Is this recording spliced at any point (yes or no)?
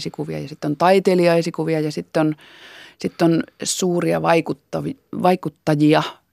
no